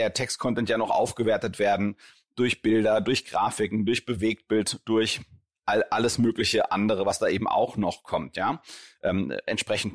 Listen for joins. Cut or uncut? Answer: uncut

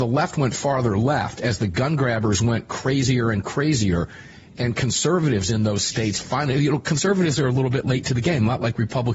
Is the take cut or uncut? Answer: uncut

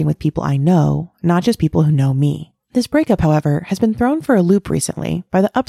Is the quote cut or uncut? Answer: cut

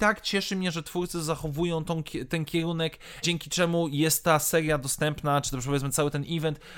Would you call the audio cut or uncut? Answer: cut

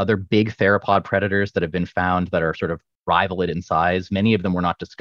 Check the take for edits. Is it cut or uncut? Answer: uncut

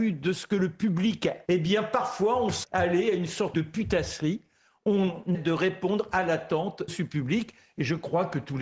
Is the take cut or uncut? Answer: cut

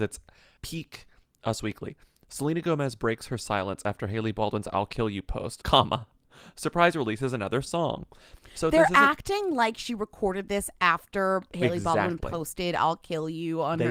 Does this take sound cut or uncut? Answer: uncut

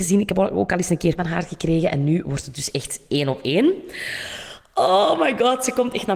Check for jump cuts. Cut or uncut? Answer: cut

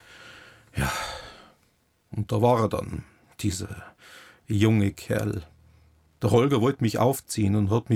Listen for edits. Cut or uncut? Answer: uncut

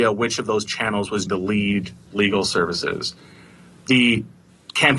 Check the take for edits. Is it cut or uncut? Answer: cut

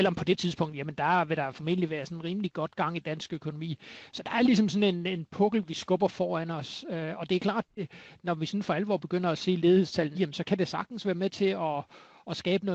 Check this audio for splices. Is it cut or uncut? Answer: cut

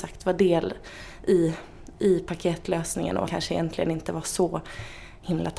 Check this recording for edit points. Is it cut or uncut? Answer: cut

